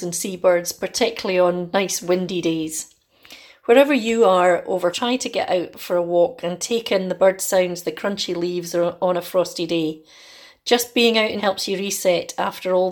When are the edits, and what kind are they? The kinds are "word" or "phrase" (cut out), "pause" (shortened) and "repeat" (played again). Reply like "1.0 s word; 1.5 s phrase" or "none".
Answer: 4.9 s word; 11.4 s word